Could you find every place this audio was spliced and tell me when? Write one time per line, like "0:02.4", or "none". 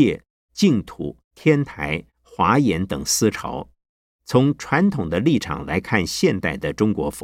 0:01.2
0:04.0